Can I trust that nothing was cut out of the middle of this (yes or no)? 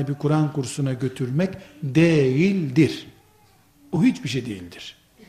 yes